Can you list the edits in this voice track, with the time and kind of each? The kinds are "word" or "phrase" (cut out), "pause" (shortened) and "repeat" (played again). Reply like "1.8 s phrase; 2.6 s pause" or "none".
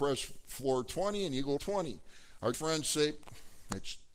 1.6 s phrase; 2.5 s word